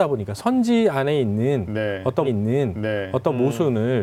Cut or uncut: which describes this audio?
cut